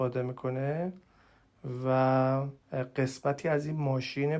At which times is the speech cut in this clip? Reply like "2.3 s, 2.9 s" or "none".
2.6 s